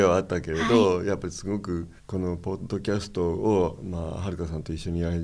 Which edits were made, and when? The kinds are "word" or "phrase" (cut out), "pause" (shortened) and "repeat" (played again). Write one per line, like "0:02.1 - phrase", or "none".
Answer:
0:02.0 - pause